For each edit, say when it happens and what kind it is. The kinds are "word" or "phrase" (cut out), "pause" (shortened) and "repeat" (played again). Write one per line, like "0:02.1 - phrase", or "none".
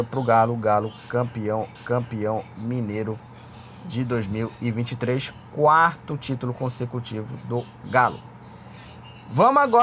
0:01.7 - repeat